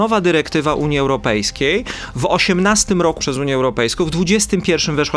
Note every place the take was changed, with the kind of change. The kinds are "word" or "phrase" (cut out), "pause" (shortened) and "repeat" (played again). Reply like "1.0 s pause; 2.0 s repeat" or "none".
3.2 s word